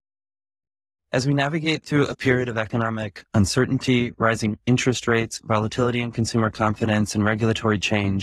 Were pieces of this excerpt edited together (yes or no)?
no